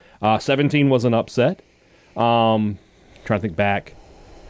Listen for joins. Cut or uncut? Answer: uncut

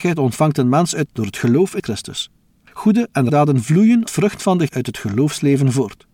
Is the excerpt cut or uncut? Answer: cut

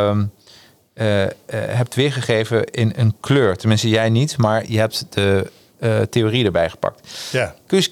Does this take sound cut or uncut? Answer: uncut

